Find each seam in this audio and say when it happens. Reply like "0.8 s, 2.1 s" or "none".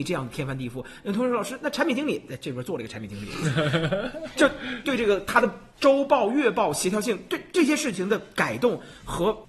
4.8 s, 5.7 s